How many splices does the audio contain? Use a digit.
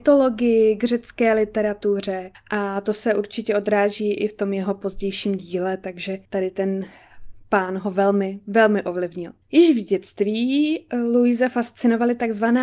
3